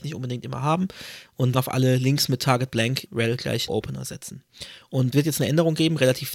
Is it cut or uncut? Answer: cut